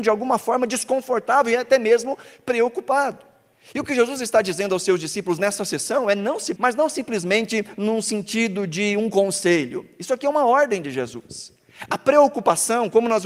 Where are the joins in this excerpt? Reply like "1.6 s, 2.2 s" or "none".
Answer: 6.6 s

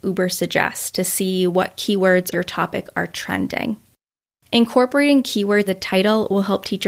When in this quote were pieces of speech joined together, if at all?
2.3 s, 5.7 s

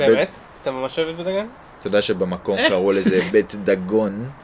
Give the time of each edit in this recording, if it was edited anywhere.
3.3 s

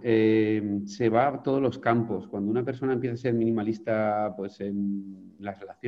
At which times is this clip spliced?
none

